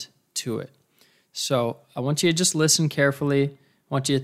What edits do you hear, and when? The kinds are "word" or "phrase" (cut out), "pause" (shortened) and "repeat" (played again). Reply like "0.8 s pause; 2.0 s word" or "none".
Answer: none